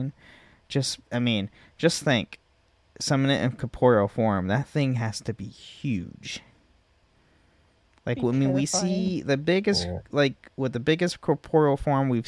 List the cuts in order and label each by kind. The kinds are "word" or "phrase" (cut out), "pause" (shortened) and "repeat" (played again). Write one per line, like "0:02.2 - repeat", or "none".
none